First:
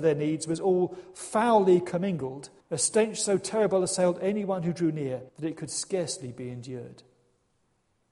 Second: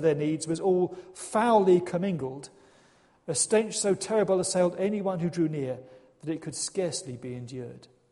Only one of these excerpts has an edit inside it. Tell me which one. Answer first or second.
first